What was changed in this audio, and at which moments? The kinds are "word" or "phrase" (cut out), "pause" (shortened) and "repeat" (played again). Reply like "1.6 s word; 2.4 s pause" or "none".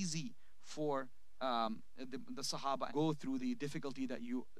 2.9 s phrase; 3.4 s word